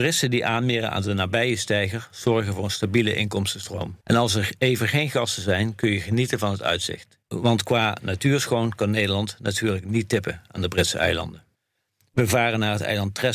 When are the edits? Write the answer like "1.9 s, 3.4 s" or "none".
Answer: 4.0 s